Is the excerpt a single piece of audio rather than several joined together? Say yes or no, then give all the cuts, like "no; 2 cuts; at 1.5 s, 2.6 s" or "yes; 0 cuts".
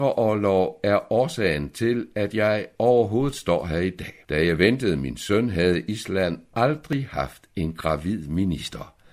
yes; 0 cuts